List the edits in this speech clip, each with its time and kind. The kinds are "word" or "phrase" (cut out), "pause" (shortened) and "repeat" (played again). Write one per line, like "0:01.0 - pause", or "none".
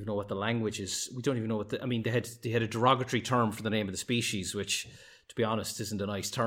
none